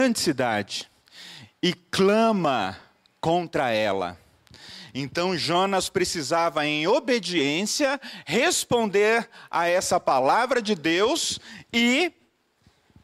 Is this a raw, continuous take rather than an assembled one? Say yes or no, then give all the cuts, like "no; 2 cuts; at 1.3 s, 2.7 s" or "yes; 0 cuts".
yes; 0 cuts